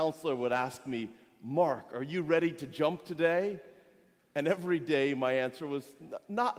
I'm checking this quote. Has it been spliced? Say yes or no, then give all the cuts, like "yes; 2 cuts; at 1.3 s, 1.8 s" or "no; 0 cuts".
no; 0 cuts